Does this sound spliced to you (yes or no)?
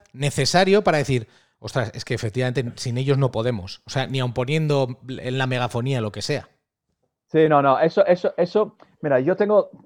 no